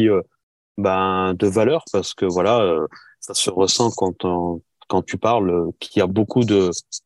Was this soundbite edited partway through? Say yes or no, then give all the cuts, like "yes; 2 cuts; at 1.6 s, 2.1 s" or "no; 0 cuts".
no; 0 cuts